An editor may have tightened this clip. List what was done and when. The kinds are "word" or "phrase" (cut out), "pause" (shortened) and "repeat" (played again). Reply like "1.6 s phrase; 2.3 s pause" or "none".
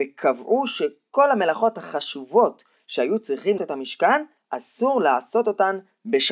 3.6 s phrase